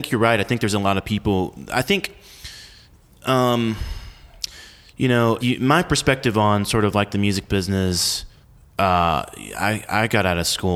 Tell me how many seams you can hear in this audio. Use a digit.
2